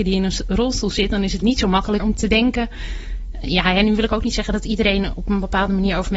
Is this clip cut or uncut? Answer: cut